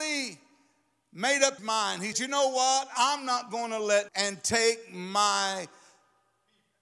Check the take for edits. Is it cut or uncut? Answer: cut